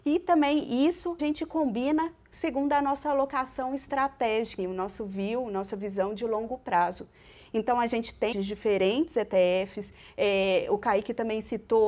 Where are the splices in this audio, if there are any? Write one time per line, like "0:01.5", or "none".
0:01.2
0:04.6
0:08.3